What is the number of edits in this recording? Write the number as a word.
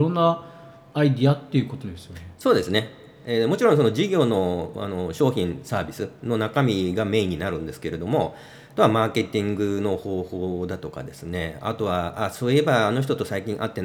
zero